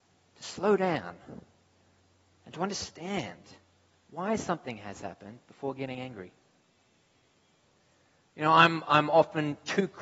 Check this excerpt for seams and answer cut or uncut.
uncut